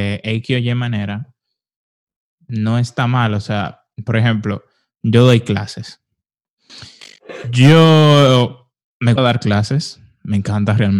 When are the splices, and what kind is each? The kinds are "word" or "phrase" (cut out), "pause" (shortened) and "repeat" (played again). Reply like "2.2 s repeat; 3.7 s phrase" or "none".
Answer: 9.2 s word